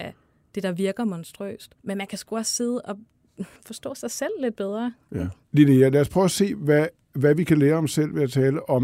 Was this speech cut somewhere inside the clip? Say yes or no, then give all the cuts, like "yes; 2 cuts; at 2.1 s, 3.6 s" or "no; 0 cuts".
yes; 3 cuts; at 1.8 s, 3.6 s, 5.4 s